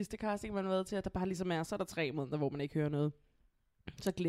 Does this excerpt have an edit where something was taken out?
no; 0 cuts

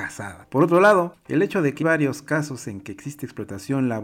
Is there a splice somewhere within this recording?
yes; 1 cut; at 1.8 s

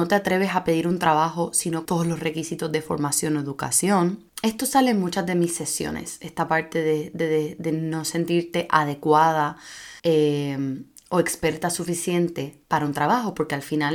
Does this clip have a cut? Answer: yes; 5 cuts; at 1.8 s, 4.3 s, 7.2 s, 10.0 s, 12.6 s

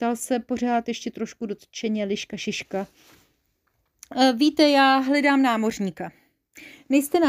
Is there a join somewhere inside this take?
no; 0 cuts

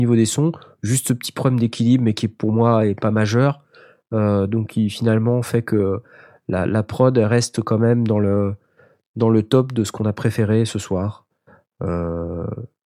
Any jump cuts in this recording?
no; 0 cuts

